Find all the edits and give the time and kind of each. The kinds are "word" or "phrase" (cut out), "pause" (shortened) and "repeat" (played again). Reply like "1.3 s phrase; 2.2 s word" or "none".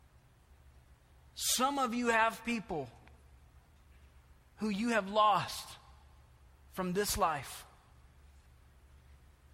none